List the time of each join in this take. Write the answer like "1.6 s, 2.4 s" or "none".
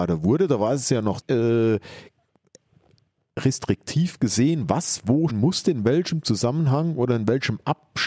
1.2 s, 5.3 s